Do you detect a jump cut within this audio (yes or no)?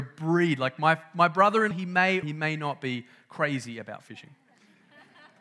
yes